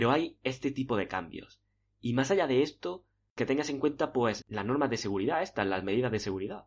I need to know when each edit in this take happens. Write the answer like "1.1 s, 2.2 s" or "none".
4.4 s